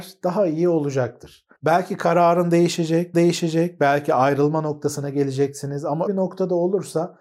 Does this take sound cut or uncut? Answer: cut